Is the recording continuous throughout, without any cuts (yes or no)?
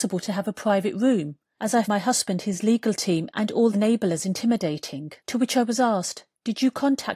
no